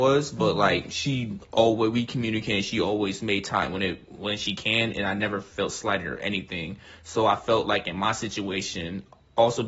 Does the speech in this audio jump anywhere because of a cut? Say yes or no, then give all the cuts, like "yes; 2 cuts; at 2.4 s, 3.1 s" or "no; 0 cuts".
no; 0 cuts